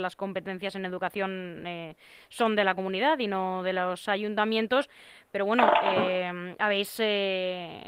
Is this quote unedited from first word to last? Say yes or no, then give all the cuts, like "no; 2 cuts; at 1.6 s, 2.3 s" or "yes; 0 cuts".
yes; 0 cuts